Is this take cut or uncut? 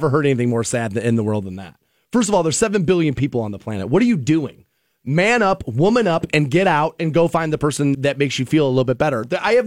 cut